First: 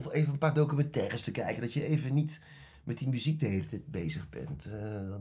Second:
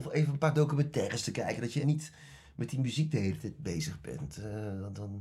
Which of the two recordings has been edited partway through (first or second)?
second